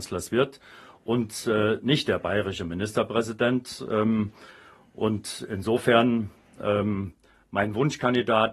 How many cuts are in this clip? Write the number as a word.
zero